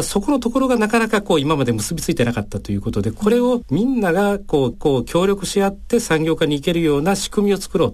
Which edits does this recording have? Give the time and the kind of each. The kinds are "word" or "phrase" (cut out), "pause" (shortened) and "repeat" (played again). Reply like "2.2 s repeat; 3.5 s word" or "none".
4.7 s repeat